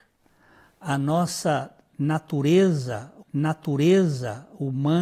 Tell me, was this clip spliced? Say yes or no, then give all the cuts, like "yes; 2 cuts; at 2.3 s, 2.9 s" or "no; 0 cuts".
yes; 1 cut; at 3.2 s